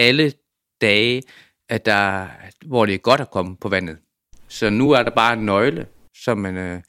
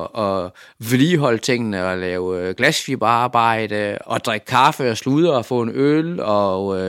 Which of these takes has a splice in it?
second; 1 cut; at 4.0 s

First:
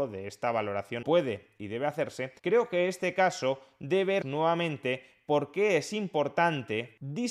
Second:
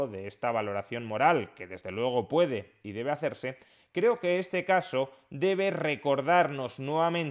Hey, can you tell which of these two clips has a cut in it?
first; 3 cuts; at 1.0 s, 2.4 s, 4.2 s

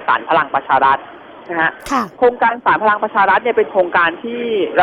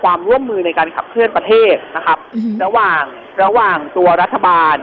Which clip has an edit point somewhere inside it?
second; 1 cut; at 3.3 s

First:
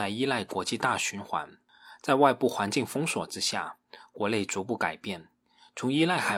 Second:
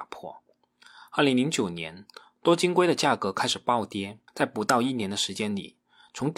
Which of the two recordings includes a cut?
second; 1 cut; at 4.3 s

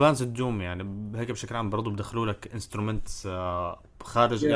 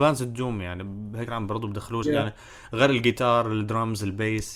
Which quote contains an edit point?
second; 2 cuts; at 1.3 s, 2.0 s

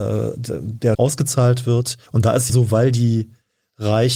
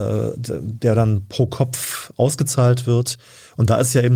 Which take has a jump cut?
first; 3 cuts; at 0.9 s, 2.1 s, 2.5 s

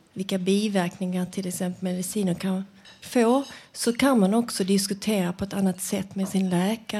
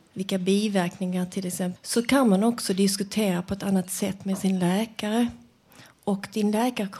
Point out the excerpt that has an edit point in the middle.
second; 1 cut; at 1.8 s

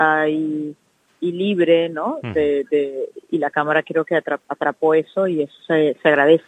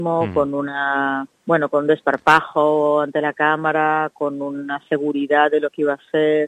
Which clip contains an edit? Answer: second; 1 cut; at 1.3 s

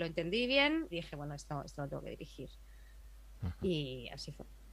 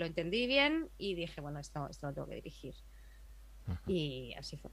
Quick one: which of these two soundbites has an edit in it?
first; 1 cut; at 0.9 s

